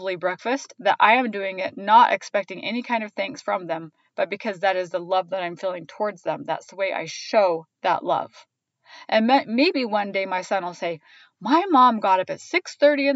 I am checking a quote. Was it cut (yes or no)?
no